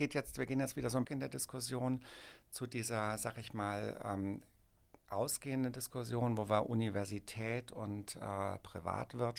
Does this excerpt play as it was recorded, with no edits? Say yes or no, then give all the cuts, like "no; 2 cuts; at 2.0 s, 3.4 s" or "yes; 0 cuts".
no; 1 cut; at 1.0 s